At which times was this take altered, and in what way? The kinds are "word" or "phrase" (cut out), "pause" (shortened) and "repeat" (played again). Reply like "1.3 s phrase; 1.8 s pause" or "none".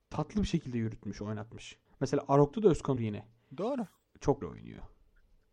1.9 s pause; 3.0 s word; 4.4 s word